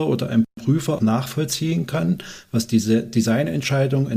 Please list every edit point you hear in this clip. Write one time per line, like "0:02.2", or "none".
0:01.0